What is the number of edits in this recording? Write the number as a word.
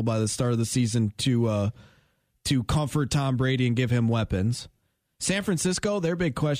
zero